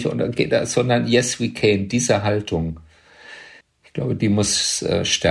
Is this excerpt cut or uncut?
cut